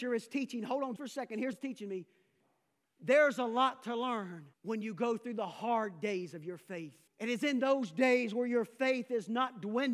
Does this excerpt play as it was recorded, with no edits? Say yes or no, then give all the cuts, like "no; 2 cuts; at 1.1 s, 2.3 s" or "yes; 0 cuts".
no; 4 cuts; at 1.0 s, 1.5 s, 4.5 s, 7.1 s